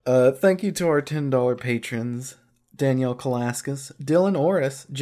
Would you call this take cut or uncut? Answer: uncut